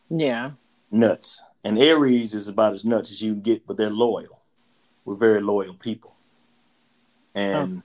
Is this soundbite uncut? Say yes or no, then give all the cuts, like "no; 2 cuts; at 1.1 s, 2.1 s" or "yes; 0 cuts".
yes; 0 cuts